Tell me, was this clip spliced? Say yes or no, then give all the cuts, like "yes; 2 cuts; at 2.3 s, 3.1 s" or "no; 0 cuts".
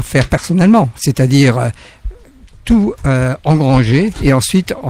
no; 0 cuts